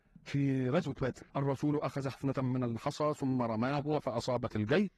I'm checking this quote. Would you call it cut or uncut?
cut